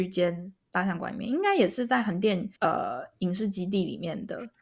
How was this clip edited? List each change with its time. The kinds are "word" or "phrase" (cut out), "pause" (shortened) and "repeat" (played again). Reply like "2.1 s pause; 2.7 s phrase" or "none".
2.6 s pause